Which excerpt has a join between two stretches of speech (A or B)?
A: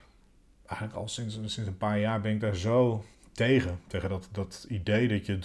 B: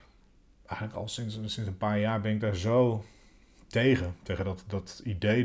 A